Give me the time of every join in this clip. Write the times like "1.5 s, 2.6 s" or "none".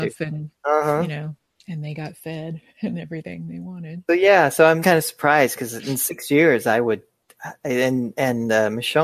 1.6 s, 4.8 s